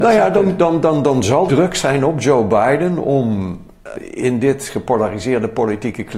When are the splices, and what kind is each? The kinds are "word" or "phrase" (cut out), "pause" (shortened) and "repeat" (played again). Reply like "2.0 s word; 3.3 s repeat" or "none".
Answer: 1.5 s word; 3.9 s word